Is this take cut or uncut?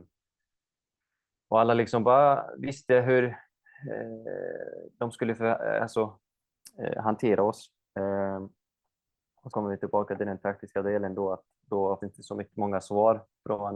cut